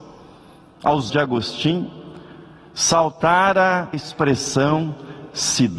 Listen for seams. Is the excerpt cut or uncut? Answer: cut